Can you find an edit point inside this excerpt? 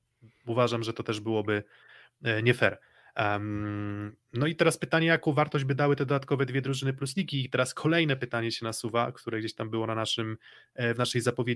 no; 0 cuts

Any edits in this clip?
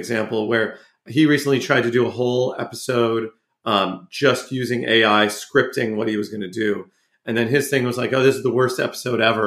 no; 0 cuts

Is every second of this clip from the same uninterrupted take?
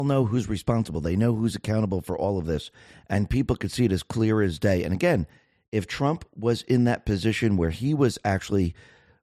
yes; 0 cuts

